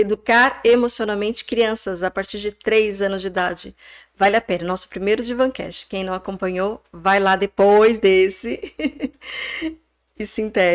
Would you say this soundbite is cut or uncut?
uncut